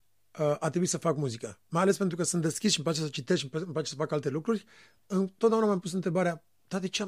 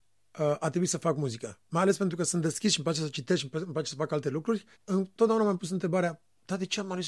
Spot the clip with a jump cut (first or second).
second